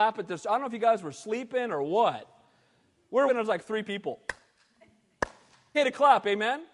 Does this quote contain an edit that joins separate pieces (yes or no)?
yes